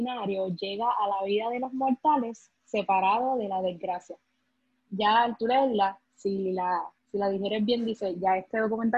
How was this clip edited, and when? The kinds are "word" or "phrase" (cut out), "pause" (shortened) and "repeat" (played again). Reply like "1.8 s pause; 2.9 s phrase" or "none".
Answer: 7.0 s pause